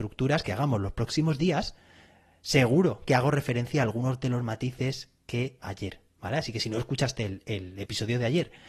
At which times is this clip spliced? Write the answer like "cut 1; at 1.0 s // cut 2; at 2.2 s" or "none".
cut 1; at 5.6 s

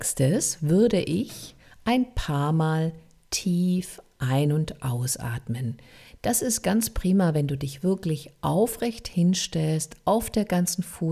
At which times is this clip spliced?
none

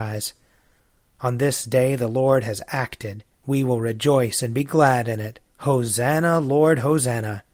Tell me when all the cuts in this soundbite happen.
cut 1; at 3.3 s // cut 2; at 5.5 s

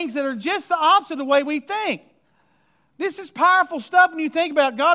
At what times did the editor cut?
none

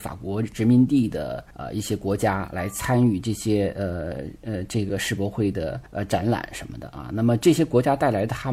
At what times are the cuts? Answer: cut 1; at 1.5 s // cut 2; at 5.9 s

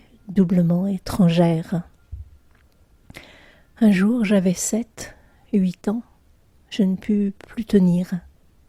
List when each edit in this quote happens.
none

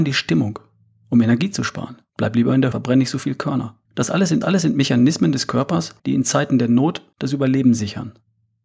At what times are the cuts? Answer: cut 1; at 2.1 s // cut 2; at 2.7 s // cut 3; at 3.9 s // cut 4; at 4.4 s // cut 5; at 6.0 s // cut 6; at 7.1 s

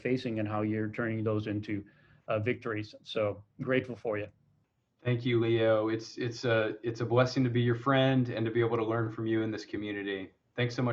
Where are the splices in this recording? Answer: none

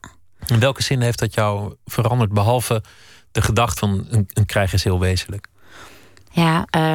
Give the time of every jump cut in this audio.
cut 1; at 3.8 s // cut 2; at 4.5 s

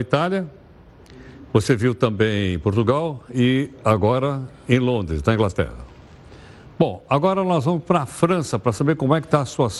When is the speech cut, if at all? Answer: none

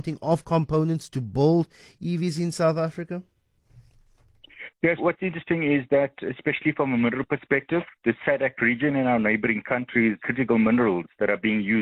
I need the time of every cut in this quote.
cut 1; at 5.0 s // cut 2; at 10.2 s

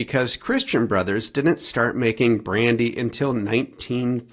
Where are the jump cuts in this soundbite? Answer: none

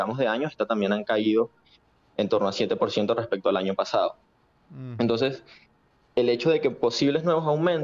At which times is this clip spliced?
none

